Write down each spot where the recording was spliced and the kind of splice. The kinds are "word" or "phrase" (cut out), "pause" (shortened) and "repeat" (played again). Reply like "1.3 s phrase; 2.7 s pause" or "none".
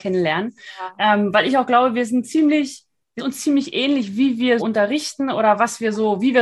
3.2 s word; 4.6 s word

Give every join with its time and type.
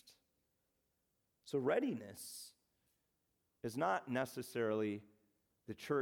none

